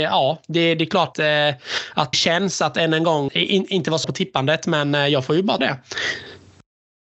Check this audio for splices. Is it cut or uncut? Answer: cut